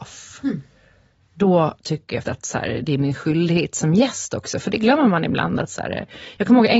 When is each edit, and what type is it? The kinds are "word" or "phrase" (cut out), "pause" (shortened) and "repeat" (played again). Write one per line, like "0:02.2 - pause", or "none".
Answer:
0:02.2 - word